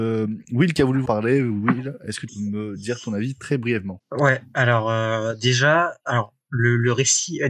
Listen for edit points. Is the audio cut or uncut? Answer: cut